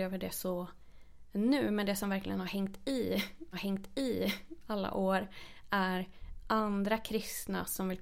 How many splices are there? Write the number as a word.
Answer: one